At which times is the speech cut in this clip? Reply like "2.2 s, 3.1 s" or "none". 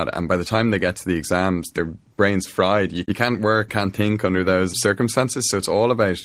3.0 s, 3.7 s, 4.7 s